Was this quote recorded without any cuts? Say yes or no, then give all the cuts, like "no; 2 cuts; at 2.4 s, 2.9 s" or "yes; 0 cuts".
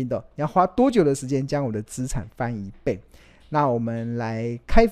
yes; 0 cuts